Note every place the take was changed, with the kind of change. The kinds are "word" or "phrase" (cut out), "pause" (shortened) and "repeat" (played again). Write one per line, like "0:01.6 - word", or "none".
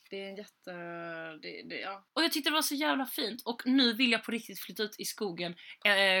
0:02.1 - pause